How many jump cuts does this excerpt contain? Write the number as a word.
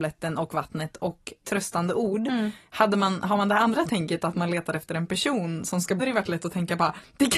two